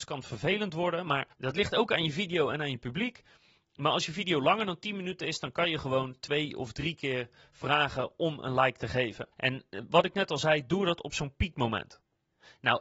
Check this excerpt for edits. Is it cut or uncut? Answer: cut